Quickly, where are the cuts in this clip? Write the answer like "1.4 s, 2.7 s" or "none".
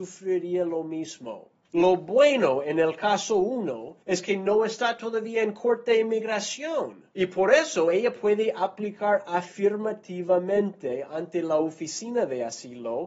1.6 s, 4.0 s, 7.1 s